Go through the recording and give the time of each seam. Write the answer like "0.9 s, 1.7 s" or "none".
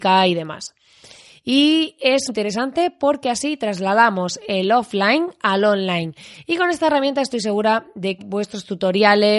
2.3 s, 8.2 s